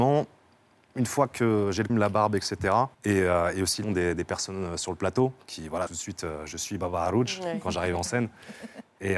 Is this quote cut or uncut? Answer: cut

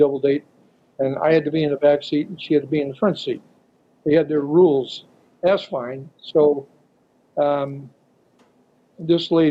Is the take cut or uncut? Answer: uncut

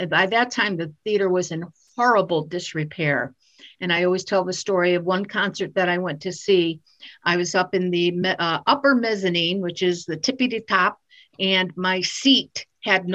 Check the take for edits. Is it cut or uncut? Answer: uncut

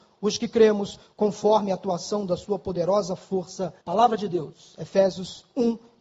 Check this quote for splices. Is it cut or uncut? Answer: cut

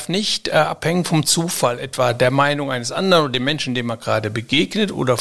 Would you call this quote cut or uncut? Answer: uncut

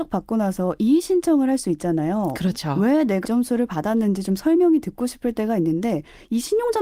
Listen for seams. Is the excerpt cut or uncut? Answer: cut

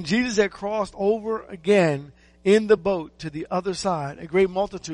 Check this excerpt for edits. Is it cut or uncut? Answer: uncut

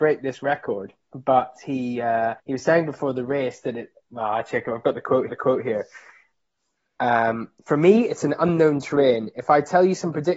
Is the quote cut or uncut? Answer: cut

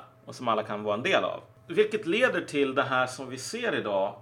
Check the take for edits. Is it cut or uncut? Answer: uncut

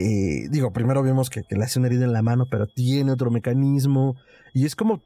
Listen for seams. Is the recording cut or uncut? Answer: uncut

